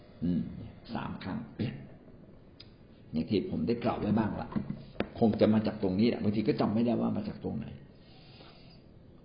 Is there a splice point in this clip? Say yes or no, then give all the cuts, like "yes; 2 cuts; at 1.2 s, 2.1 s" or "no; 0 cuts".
no; 0 cuts